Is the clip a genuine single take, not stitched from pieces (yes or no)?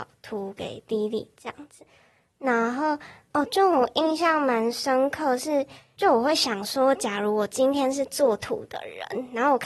yes